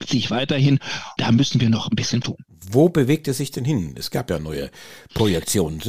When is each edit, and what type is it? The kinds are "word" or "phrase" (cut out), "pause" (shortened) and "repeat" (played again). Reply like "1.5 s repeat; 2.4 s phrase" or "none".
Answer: 1.2 s word; 2.2 s word